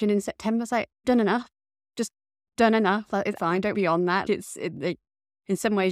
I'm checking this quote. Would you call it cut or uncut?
cut